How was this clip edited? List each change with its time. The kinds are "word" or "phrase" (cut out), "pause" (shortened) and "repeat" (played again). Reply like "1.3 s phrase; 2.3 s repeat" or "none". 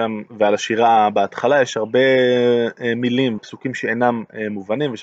3.4 s word